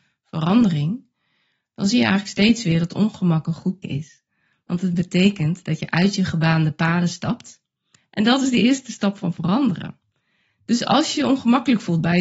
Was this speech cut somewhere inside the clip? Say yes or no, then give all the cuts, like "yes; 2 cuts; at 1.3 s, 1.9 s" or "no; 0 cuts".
yes; 1 cut; at 3.8 s